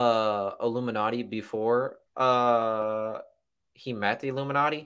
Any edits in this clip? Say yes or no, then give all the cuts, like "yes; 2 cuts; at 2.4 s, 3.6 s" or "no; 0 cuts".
yes; 1 cut; at 2.1 s